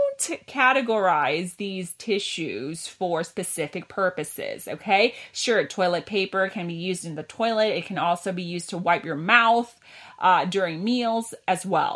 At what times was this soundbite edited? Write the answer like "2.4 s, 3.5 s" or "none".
none